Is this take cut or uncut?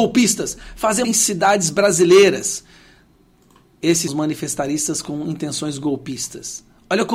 cut